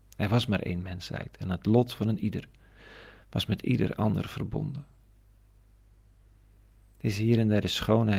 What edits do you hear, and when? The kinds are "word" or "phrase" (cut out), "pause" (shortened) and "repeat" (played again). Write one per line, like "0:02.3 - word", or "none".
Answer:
none